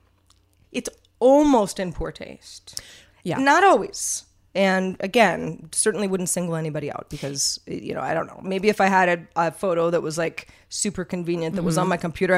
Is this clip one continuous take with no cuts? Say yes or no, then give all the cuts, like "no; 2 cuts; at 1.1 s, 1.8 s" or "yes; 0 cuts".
yes; 0 cuts